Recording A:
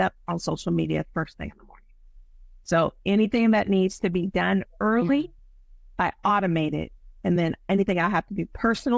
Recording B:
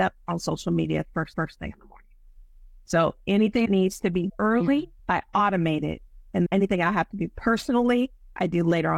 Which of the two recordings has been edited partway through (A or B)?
B